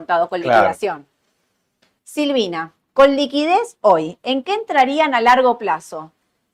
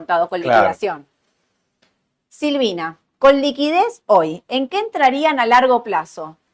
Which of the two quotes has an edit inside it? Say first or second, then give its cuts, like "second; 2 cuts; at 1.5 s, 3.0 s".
first; 1 cut; at 2.0 s